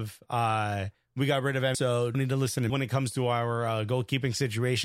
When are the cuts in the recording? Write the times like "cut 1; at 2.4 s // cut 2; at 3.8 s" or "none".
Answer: cut 1; at 1.7 s // cut 2; at 2.1 s // cut 3; at 2.7 s